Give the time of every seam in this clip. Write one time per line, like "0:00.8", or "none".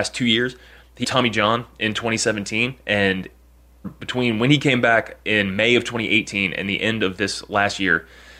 0:01.0
0:03.8